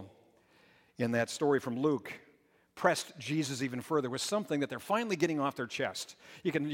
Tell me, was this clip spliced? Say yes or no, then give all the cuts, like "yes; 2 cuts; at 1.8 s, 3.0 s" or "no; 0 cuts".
no; 0 cuts